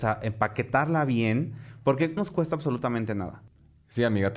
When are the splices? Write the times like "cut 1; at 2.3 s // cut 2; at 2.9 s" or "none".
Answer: cut 1; at 2.2 s